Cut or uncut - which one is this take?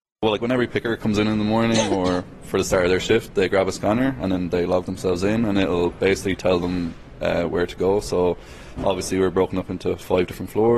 uncut